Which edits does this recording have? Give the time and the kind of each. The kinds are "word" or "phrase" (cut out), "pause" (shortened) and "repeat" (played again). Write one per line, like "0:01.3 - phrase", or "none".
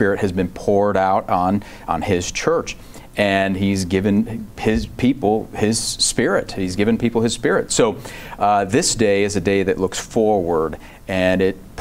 none